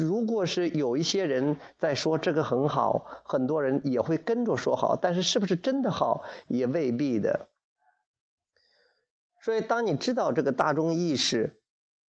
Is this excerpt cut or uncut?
uncut